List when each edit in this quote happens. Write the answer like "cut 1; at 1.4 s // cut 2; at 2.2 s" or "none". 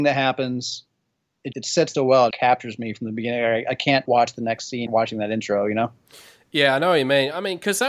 cut 1; at 1.5 s // cut 2; at 1.9 s // cut 3; at 2.3 s // cut 4; at 4.1 s // cut 5; at 4.9 s

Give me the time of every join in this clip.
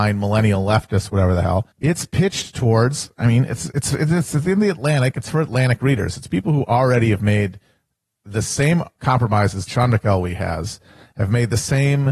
cut 1; at 1.7 s // cut 2; at 9.0 s // cut 3; at 9.7 s

